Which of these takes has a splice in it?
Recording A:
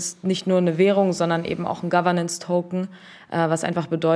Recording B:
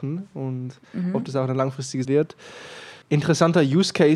B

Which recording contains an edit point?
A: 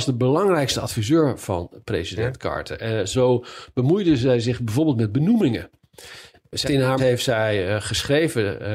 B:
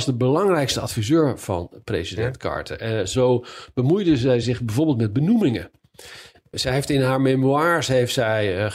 A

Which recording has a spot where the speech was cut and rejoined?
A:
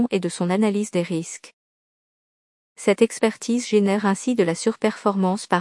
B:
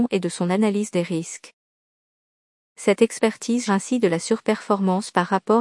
B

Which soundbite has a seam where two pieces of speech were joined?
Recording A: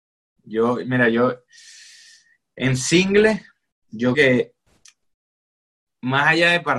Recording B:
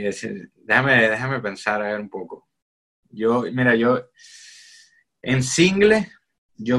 A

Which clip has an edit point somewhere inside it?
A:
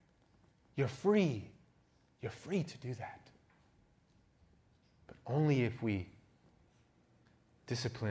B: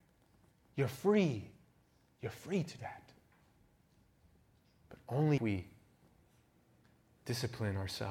B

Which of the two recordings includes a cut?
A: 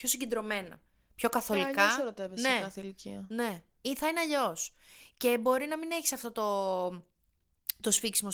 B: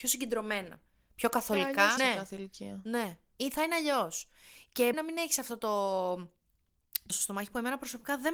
B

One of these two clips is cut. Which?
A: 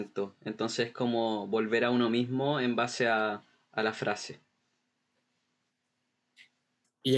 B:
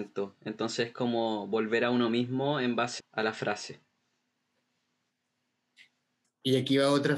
B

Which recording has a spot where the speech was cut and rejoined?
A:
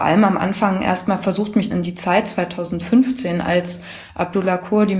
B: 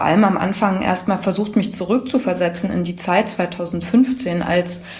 A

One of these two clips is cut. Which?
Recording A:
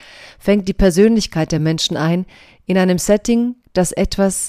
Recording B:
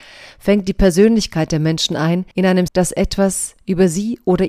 B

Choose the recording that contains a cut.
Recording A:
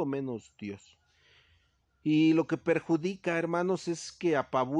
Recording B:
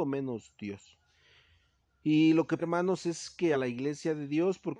B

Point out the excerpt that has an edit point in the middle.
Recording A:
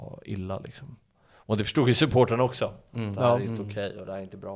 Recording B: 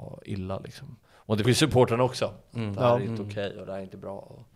B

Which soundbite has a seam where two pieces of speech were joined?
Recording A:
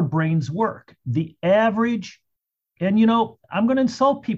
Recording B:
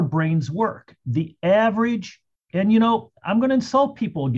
B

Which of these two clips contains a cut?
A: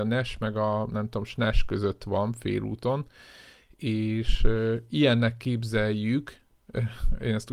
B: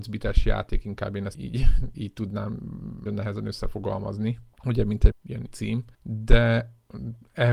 B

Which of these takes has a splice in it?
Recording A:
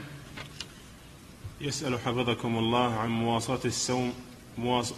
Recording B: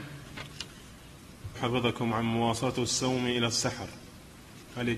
B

